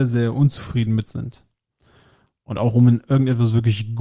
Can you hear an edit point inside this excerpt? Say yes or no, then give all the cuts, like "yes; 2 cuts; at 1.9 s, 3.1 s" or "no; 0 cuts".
yes; 1 cut; at 1.0 s